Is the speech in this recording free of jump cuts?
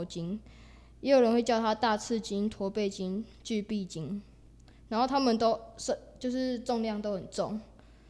yes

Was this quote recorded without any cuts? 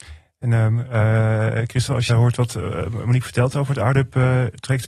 no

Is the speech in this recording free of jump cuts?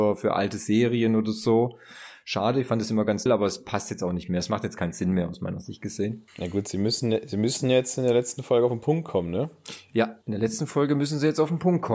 no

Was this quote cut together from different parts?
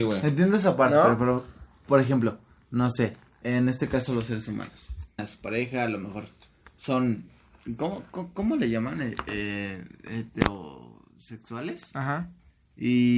yes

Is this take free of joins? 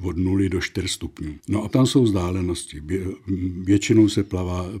no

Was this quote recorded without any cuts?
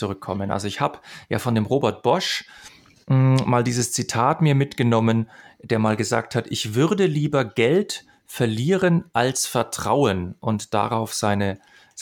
yes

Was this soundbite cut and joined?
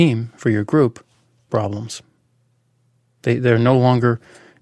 yes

